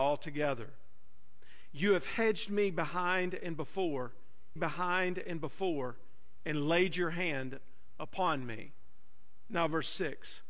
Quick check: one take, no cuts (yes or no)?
no